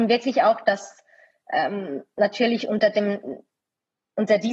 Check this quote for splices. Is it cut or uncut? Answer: uncut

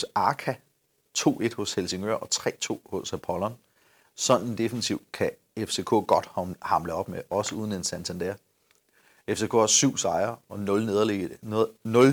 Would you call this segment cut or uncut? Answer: uncut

